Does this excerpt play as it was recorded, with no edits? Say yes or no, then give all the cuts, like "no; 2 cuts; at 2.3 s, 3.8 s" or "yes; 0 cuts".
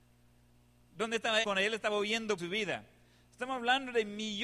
no; 2 cuts; at 1.4 s, 2.4 s